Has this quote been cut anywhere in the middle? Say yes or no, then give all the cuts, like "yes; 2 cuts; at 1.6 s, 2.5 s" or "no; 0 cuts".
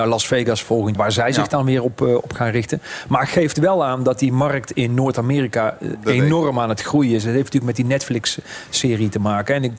yes; 1 cut; at 1.0 s